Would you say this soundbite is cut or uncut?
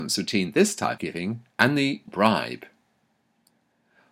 cut